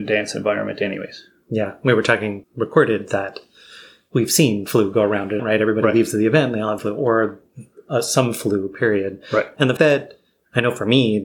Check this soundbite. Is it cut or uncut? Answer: cut